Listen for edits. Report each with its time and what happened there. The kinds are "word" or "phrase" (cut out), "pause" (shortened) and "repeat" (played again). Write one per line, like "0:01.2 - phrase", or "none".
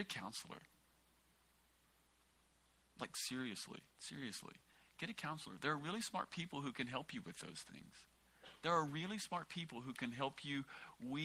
0:03.9 - pause